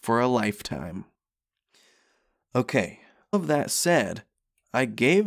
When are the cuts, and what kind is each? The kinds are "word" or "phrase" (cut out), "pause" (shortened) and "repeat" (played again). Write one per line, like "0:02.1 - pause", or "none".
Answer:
0:03.3 - word